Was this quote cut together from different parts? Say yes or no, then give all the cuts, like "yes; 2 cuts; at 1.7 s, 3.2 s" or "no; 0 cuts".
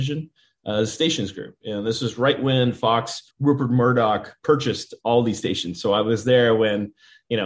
yes; 1 cut; at 3.3 s